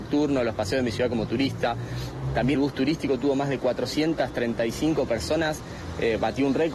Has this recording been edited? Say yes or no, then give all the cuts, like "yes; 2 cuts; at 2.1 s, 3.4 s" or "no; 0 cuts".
yes; 1 cut; at 2.5 s